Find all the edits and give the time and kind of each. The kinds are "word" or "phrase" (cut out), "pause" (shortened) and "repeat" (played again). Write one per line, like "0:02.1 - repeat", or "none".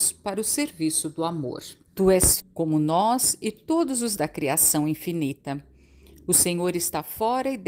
0:01.8 - pause
0:02.4 - phrase
0:04.2 - word

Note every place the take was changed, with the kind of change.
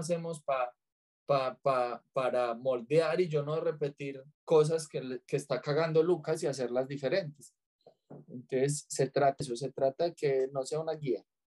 0:04.3 - pause
0:09.4 - word

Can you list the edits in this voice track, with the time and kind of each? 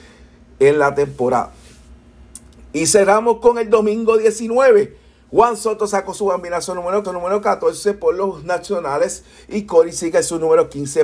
0:07.0 - repeat

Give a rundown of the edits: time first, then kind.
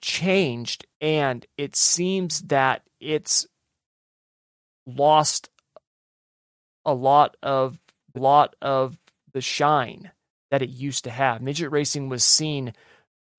0:00.9 - pause
0:08.1 - repeat

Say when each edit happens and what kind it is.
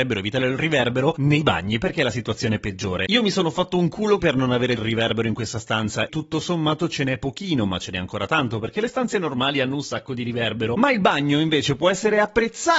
0:04.2 - word
0:04.8 - word
0:06.1 - word

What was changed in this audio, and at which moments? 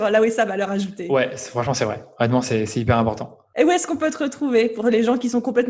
none

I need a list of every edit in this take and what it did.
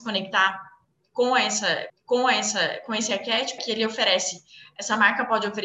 0:01.9 - repeat
0:03.6 - word

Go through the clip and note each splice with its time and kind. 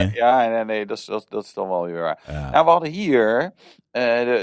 none

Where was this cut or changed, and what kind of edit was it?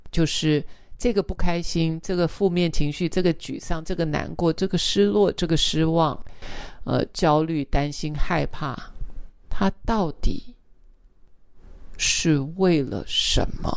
0:09.4 - pause

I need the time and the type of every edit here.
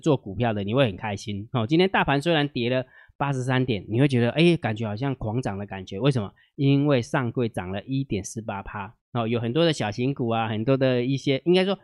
0:09.0 - pause

